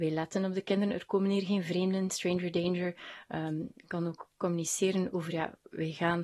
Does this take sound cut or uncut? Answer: uncut